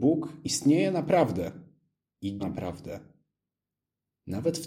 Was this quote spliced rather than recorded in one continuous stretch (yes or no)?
yes